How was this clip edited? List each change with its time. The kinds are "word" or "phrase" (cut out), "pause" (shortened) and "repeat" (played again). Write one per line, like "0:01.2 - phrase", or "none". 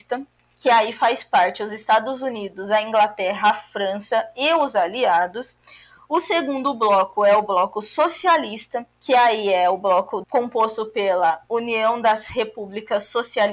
0:08.9 - pause
0:10.2 - word